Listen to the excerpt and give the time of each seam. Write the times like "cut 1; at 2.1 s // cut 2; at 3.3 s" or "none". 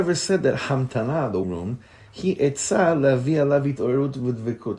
cut 1; at 1.4 s